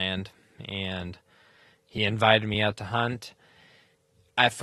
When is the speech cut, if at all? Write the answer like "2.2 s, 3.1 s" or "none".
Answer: none